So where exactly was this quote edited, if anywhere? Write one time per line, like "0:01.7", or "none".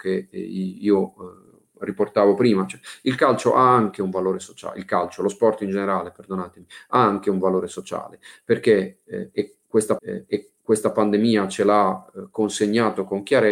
0:10.0

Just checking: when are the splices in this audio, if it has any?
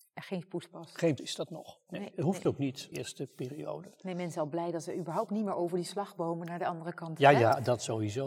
0:01.2
0:02.9

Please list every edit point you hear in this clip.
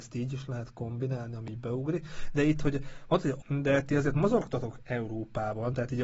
0:03.4

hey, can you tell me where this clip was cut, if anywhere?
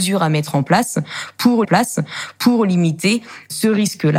0:01.6

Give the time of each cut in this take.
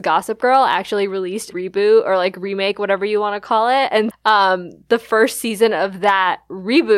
0:01.5
0:04.1

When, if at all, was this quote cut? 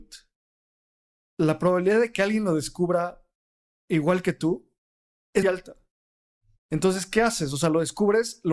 0:05.4

